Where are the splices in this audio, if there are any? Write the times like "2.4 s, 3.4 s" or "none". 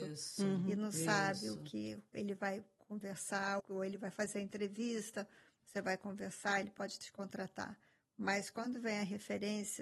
2.1 s, 3.6 s